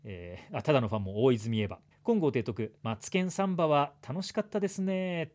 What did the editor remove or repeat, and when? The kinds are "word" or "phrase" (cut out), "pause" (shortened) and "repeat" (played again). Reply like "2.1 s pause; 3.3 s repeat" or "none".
1.9 s pause; 2.8 s pause